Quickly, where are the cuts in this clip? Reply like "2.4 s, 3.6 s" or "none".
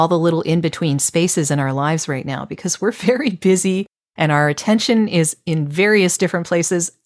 none